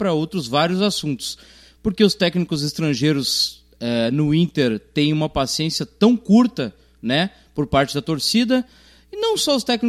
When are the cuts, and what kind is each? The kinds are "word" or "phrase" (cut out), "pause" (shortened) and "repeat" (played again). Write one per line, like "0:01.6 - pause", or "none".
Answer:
none